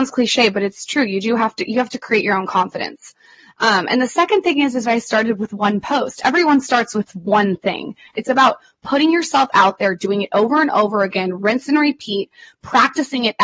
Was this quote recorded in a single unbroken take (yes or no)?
no